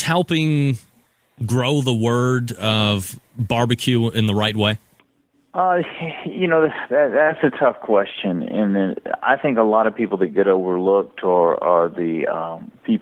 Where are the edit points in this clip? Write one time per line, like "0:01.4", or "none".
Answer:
none